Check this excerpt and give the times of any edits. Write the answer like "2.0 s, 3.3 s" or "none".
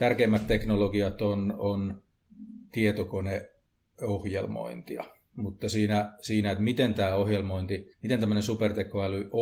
7.9 s